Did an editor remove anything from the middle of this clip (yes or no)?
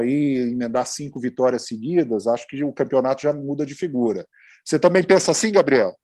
no